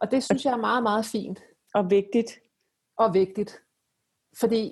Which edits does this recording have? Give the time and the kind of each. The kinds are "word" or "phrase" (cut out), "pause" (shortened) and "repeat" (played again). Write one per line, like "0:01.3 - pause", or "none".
none